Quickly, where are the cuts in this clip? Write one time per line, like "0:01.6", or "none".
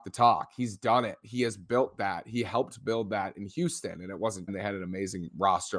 0:04.5